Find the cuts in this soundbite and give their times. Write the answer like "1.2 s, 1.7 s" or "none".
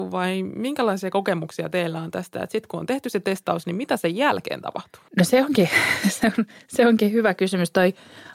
5.1 s